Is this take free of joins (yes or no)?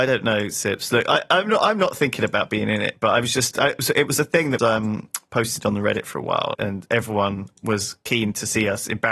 no